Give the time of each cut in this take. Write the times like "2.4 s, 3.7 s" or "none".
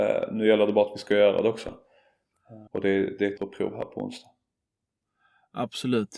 2.7 s, 3.4 s